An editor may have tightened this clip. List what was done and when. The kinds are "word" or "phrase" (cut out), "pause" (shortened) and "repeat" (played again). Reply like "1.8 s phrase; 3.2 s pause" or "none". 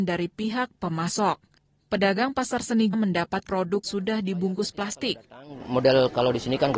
1.6 s pause; 2.9 s phrase; 3.5 s word; 3.8 s word